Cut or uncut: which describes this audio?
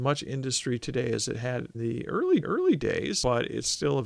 cut